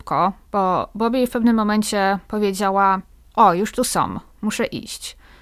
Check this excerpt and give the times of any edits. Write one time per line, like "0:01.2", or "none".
none